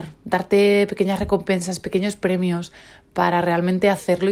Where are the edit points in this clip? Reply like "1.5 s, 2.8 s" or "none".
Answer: none